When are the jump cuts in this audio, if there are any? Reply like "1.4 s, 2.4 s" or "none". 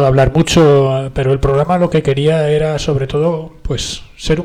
none